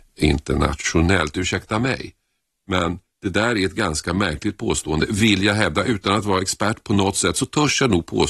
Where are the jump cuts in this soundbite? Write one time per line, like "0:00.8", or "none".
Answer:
0:02.4